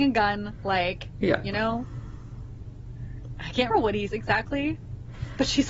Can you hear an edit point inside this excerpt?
yes; 2 cuts; at 3.7 s, 4.1 s

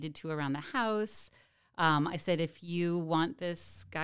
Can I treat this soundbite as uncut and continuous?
yes; 0 cuts

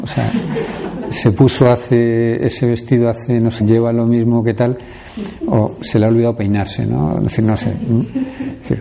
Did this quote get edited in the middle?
yes; 1 cut; at 3.6 s

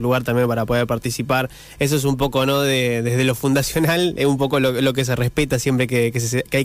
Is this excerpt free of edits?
yes; 0 cuts

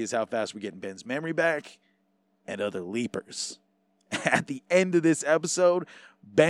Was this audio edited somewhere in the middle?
no; 0 cuts

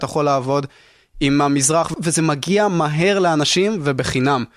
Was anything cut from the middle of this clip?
no; 0 cuts

